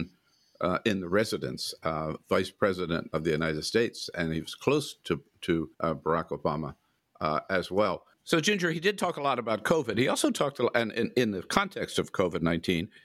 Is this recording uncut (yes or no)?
no